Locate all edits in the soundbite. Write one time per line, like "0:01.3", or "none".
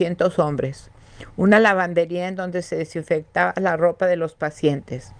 none